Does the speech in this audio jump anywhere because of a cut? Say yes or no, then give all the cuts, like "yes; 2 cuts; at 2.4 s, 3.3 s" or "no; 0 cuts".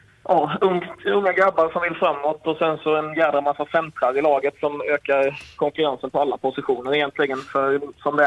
no; 0 cuts